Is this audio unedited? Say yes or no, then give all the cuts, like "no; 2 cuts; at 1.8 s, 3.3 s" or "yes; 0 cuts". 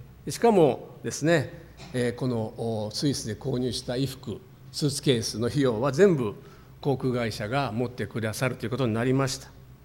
yes; 0 cuts